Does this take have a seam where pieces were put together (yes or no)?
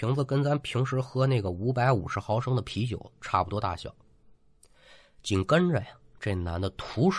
no